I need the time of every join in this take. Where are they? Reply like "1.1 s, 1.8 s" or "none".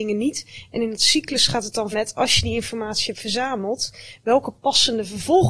1.9 s